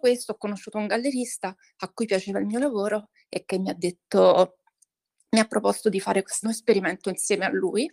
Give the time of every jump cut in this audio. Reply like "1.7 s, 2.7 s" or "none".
6.4 s

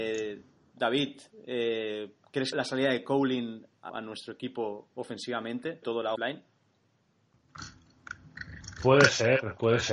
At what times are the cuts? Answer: 2.5 s, 3.9 s, 5.8 s, 6.2 s

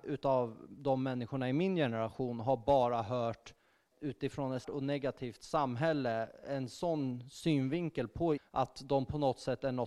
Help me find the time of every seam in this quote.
3.9 s, 4.6 s, 8.4 s

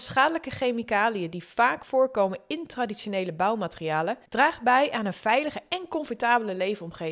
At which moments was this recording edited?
4.3 s

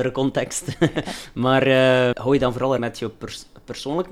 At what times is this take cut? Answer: 2.1 s, 2.8 s

